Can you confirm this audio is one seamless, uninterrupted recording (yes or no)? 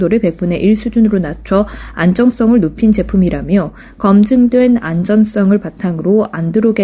yes